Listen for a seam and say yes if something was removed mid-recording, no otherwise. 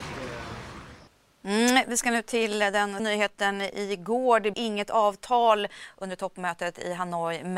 yes